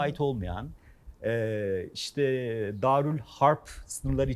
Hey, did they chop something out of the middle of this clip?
no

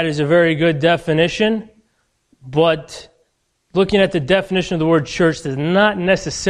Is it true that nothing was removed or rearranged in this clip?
yes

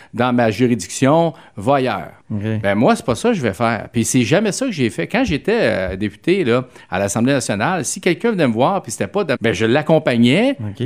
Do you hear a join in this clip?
yes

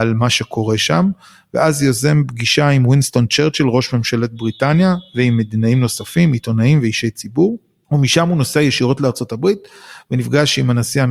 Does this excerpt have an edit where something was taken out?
no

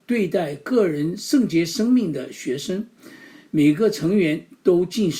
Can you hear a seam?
no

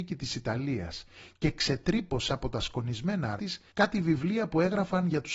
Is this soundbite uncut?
no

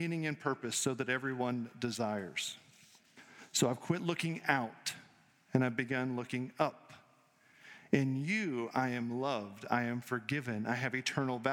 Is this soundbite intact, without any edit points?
yes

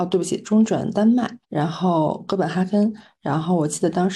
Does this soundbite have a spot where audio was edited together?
yes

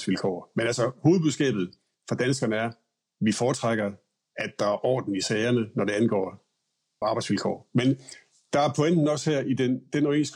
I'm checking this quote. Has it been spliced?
yes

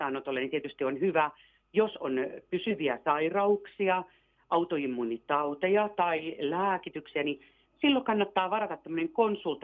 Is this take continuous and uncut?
yes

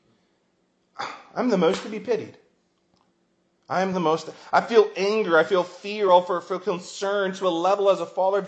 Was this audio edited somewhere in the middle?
no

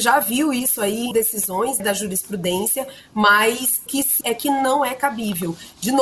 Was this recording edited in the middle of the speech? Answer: yes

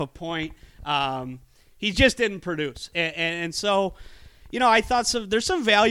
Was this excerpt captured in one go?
yes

